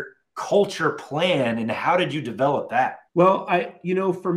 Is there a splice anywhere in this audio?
yes; 1 cut; at 3.1 s

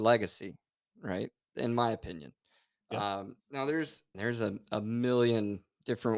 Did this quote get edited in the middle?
yes; 2 cuts; at 3.4 s, 4.1 s

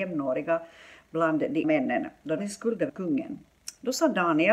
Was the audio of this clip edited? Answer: yes; 3 cuts; at 1.6 s, 2.4 s, 2.9 s

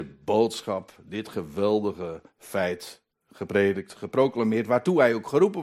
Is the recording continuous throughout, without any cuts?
yes; 0 cuts

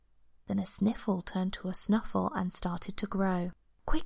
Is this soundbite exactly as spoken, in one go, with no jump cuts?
yes; 0 cuts

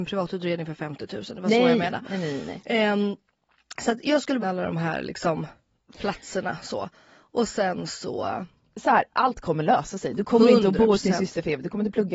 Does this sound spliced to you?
yes; 1 cut; at 4.4 s

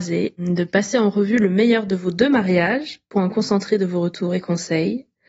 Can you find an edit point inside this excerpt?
no; 0 cuts

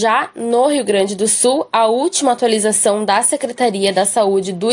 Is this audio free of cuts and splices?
yes; 0 cuts

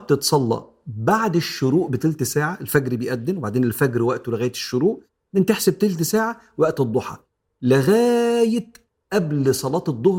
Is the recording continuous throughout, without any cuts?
yes; 0 cuts

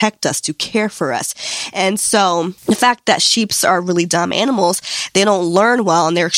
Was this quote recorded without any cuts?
no; 1 cut; at 2.6 s

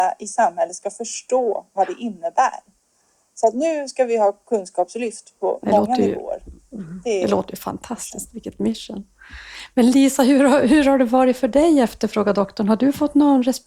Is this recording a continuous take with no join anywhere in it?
yes; 0 cuts

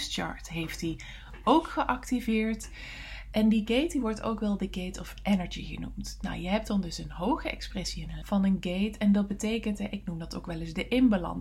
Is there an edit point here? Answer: yes; 1 cut; at 8.2 s

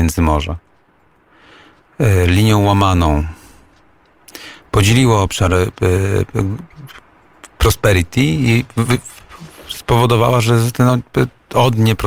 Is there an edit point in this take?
no; 0 cuts

